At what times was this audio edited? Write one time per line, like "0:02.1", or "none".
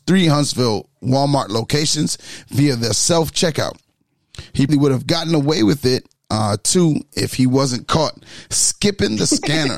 0:04.7
0:06.2